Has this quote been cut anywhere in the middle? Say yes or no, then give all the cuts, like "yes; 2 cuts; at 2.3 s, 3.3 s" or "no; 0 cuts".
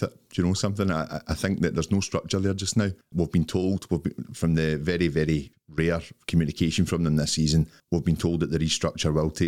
no; 0 cuts